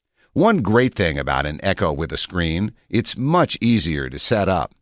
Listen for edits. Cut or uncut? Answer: uncut